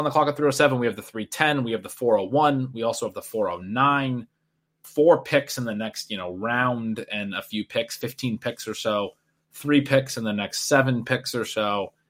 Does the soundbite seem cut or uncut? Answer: uncut